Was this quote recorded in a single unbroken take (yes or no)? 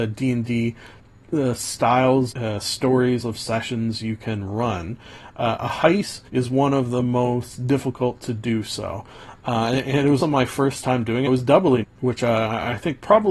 no